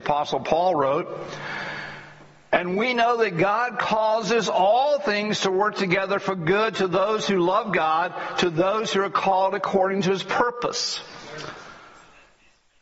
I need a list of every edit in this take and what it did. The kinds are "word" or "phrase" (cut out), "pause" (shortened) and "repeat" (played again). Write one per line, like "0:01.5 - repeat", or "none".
none